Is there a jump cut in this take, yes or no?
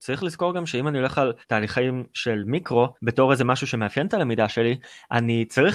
yes